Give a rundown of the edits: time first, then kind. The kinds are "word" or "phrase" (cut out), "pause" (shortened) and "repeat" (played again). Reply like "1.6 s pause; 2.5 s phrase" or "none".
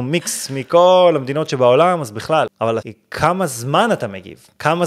2.8 s word